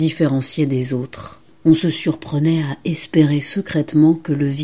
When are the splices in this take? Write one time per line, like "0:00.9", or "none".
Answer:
0:01.5